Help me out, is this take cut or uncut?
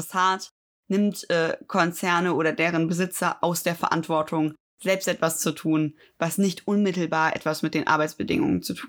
uncut